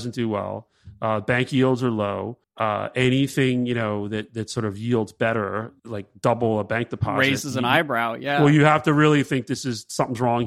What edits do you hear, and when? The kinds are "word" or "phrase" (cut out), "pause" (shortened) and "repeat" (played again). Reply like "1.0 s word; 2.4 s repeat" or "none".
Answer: 2.4 s pause; 5.8 s pause